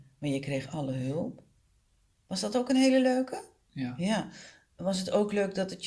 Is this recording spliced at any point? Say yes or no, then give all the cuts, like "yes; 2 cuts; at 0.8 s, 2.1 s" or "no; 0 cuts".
no; 0 cuts